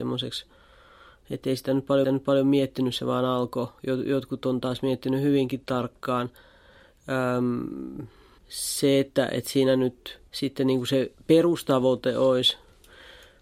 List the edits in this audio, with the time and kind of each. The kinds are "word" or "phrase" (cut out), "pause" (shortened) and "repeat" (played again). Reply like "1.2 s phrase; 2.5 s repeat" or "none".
2.0 s repeat; 8.4 s pause; 10.3 s pause